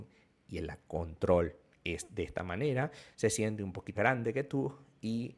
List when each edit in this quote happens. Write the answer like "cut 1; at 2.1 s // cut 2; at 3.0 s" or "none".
cut 1; at 1.7 s // cut 2; at 4.0 s